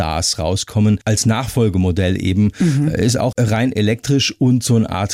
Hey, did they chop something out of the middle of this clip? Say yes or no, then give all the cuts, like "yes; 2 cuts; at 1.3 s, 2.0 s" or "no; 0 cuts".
yes; 1 cut; at 3.3 s